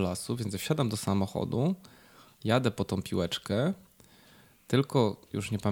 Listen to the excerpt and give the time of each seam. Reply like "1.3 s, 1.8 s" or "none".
none